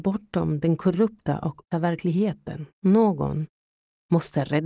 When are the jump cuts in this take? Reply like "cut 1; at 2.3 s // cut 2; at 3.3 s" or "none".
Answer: cut 1; at 1.7 s // cut 2; at 2.7 s